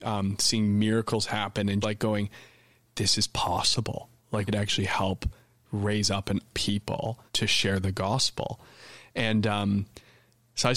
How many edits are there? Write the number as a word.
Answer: four